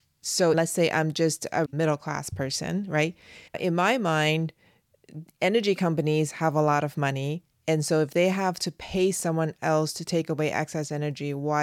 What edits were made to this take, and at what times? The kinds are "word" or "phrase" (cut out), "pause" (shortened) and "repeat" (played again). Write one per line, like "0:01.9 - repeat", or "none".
0:01.7 - word
0:03.5 - pause